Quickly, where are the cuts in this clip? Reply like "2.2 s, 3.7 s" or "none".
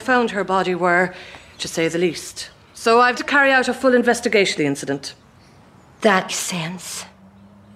1.6 s, 3.1 s, 4.6 s, 6.3 s